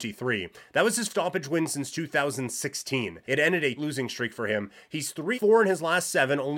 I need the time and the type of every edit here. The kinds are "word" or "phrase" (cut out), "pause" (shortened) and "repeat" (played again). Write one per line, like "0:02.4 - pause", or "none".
0:01.1 - word
0:03.2 - pause
0:03.8 - word
0:05.3 - word